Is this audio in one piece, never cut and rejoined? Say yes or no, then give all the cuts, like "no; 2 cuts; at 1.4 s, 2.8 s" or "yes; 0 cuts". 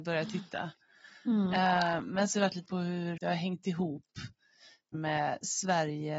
no; 4 cuts; at 2.3 s, 2.7 s, 3.2 s, 4.9 s